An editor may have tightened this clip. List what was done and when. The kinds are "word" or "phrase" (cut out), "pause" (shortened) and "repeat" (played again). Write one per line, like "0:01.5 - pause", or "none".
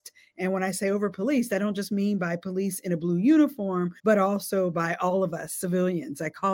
0:04.0 - pause